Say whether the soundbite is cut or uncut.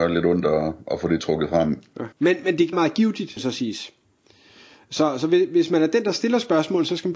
cut